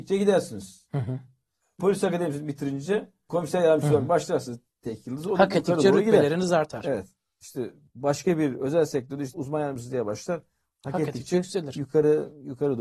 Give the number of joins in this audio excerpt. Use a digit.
0